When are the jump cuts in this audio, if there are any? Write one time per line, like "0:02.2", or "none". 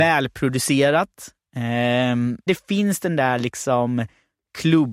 0:02.5